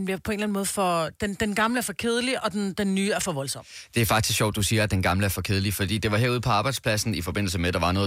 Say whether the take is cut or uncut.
uncut